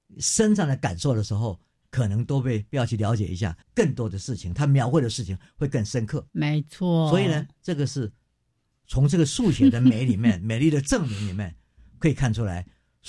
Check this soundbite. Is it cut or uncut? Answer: cut